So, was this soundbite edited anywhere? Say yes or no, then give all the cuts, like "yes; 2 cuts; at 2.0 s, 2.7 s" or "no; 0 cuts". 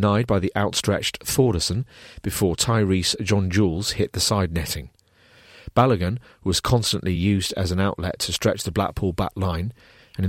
no; 0 cuts